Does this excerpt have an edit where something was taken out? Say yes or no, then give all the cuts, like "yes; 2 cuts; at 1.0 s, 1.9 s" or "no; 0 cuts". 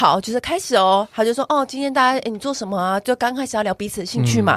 no; 0 cuts